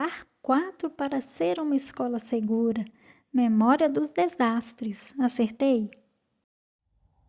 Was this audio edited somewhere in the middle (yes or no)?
no